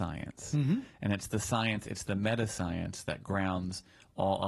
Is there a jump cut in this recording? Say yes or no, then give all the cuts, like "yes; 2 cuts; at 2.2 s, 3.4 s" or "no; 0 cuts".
no; 0 cuts